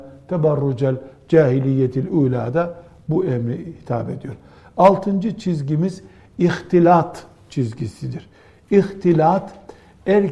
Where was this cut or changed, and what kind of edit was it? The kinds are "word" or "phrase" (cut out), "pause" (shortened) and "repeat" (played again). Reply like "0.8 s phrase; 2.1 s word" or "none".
none